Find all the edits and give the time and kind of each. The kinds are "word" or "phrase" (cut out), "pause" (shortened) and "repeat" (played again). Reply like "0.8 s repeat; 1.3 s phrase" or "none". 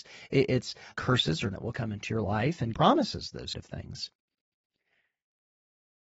0.9 s word; 1.5 s word; 2.7 s word; 3.5 s word